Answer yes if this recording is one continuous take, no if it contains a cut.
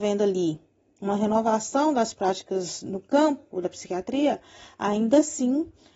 yes